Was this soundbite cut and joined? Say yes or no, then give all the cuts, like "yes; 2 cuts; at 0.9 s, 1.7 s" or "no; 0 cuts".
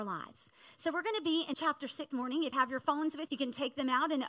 yes; 4 cuts; at 1.5 s, 2.1 s, 2.5 s, 3.3 s